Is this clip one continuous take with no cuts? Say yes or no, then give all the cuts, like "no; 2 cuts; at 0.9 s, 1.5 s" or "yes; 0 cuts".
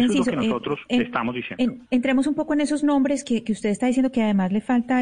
no; 1 cut; at 1.9 s